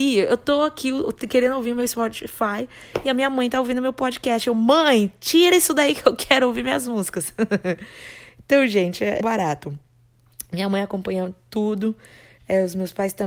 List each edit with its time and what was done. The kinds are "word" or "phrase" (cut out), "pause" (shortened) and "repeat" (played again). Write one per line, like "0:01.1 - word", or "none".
0:09.2 - phrase

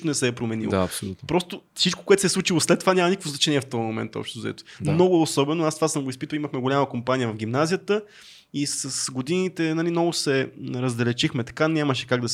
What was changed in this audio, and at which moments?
0:01.7 - pause

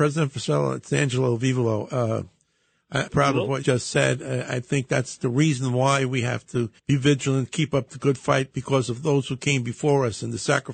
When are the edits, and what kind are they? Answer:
0:03.1 - word
0:03.6 - phrase
0:06.8 - pause

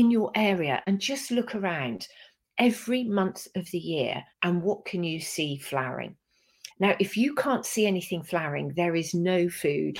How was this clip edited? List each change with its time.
0:04.3 - pause
0:06.7 - pause

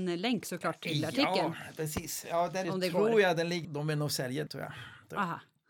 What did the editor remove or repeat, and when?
0:02.6 - word
0:03.6 - word
0:04.5 - word

